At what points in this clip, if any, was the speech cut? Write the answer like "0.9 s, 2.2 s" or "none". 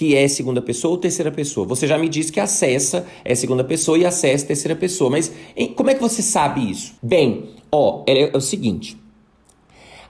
7.0 s